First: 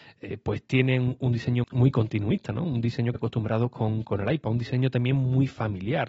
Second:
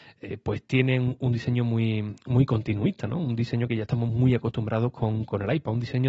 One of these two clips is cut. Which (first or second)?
first